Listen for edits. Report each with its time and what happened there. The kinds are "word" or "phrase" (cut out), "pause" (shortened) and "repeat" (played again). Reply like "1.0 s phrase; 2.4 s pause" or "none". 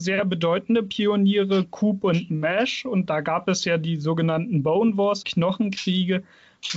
5.2 s phrase